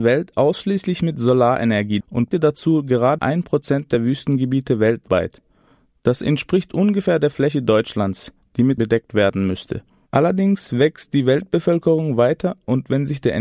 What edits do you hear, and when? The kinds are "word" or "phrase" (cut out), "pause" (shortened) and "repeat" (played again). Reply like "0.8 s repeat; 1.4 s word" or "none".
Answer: 2.0 s word; 2.3 s word; 3.2 s word; 8.8 s word

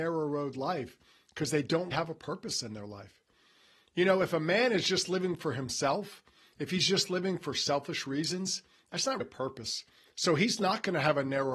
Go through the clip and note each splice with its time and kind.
1.9 s word; 9.2 s word

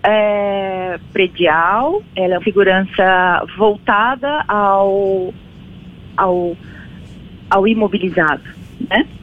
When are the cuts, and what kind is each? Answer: 2.4 s word; 4.5 s word

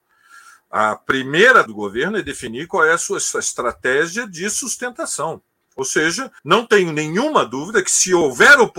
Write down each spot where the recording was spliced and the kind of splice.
1.7 s word; 5.6 s pause; 6.4 s pause

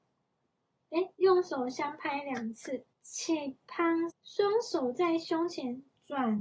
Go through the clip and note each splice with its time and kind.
1.2 s pause; 2.9 s pause; 4.1 s word

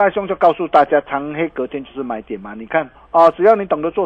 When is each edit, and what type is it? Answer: 2.9 s pause

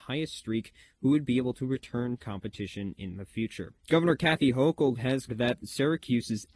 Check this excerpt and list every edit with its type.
2.2 s word; 3.8 s pause; 5.3 s word

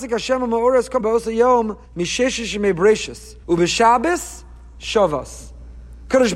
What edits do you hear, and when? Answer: 1.0 s word; 1.8 s pause; 3.4 s pause

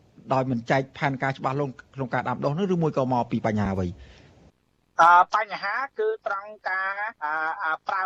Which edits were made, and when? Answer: 4.5 s pause; 7.1 s pause

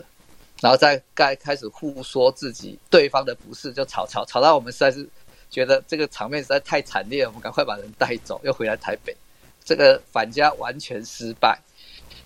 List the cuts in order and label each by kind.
2.8 s word

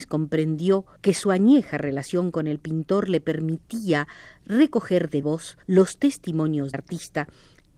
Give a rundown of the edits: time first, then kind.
1.0 s pause; 5.2 s word; 5.6 s pause; 6.7 s word

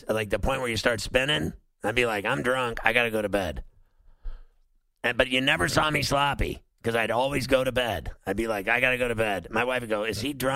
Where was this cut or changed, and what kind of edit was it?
none

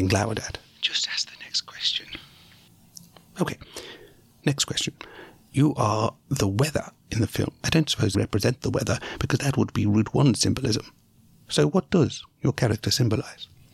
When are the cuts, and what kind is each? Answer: 8.1 s phrase

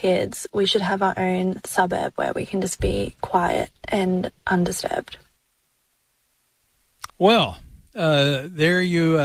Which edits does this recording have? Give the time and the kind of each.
7.1 s pause

